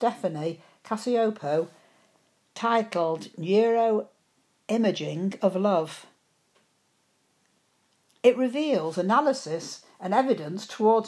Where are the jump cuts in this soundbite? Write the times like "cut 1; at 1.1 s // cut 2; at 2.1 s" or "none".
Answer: none